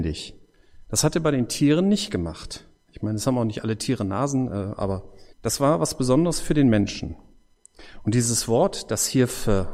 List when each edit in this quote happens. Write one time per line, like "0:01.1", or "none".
0:05.3